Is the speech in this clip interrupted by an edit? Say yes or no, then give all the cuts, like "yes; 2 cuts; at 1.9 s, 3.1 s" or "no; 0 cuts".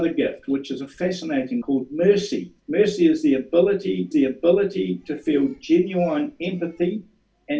yes; 3 cuts; at 1.6 s, 2.6 s, 4.1 s